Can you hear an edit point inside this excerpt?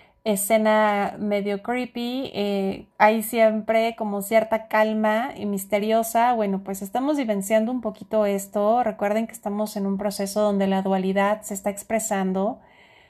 yes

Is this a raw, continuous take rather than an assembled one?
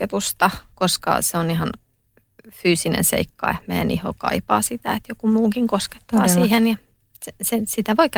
yes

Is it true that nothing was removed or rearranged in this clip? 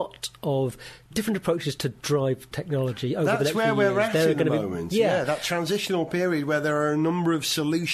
no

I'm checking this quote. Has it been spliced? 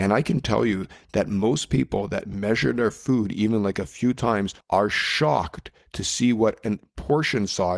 yes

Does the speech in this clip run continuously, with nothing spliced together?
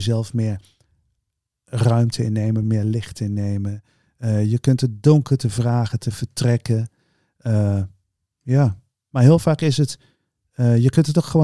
yes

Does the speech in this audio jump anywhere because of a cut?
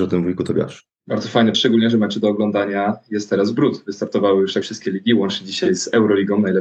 yes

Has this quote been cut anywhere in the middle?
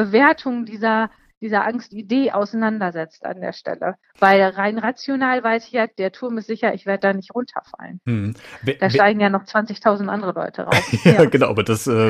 no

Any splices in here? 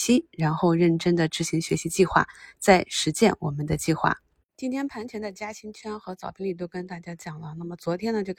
no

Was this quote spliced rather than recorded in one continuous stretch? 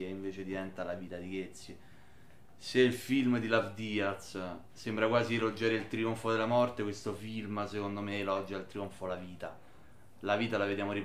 no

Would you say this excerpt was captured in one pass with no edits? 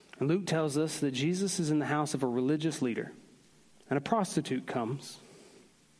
no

